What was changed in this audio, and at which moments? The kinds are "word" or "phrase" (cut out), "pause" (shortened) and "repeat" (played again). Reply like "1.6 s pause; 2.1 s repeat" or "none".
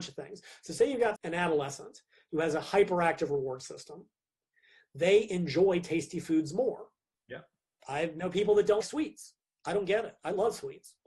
1.2 s word; 8.8 s word